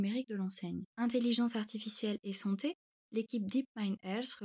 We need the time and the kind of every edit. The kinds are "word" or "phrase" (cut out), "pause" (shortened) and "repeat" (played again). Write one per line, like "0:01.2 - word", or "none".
0:00.9 - pause